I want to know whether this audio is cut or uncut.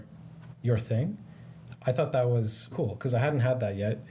cut